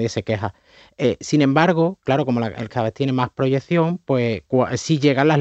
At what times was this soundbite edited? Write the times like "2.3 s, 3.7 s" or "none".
2.7 s